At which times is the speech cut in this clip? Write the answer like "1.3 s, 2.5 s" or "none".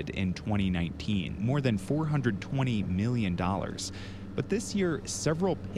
1.4 s